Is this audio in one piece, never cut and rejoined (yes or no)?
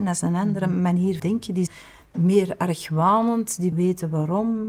no